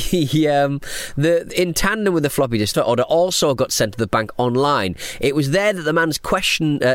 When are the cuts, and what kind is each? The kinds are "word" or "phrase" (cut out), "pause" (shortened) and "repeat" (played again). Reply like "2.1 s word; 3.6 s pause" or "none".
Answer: 2.7 s phrase